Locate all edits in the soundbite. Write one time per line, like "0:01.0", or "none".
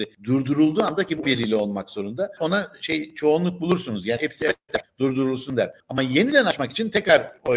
0:01.2
0:02.4
0:04.2